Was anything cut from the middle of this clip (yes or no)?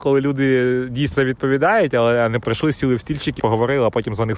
yes